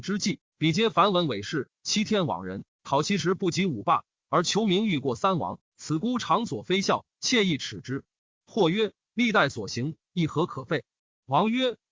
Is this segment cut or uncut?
uncut